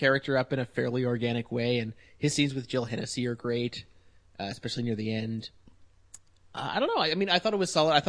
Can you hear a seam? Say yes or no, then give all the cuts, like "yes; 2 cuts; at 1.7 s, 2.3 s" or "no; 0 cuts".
no; 0 cuts